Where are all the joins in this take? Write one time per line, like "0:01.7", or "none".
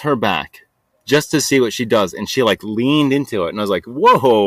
none